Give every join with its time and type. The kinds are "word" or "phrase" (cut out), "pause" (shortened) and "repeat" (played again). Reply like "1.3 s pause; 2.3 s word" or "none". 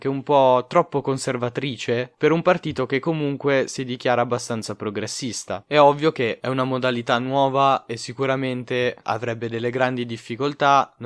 none